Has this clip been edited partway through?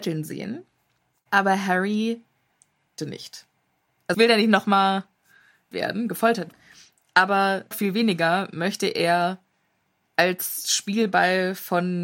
yes; 5 cuts; at 3.0 s, 4.1 s, 5.7 s, 6.5 s, 7.7 s

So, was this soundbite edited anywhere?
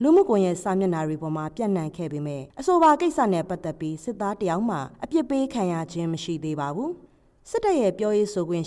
yes; 3 cuts; at 2.5 s, 4.9 s, 7.1 s

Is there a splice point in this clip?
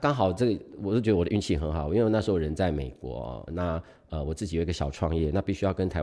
yes; 1 cut; at 3.5 s

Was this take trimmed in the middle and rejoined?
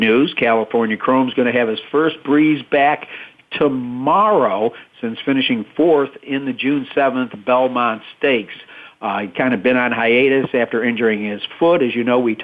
no; 0 cuts

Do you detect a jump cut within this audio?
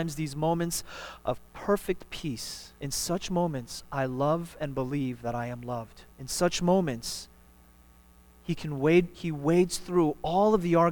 yes; 2 cuts; at 2.8 s, 6.1 s

